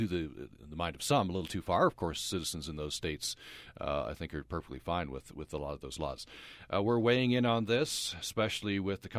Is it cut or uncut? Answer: uncut